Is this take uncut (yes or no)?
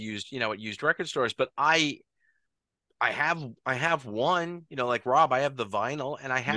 yes